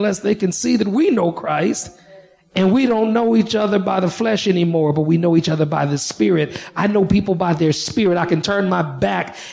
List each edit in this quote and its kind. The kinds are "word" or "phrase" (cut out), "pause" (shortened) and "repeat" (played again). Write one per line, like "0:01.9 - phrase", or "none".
none